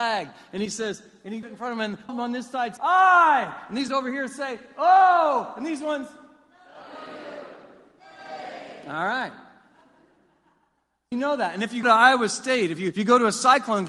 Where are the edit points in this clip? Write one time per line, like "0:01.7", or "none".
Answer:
0:01.4
0:02.1
0:02.8
0:03.9
0:11.1
0:11.8
0:12.9